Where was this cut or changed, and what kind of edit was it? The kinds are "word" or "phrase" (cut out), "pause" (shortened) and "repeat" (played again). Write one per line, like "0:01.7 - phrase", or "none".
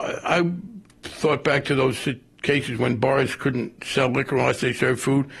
none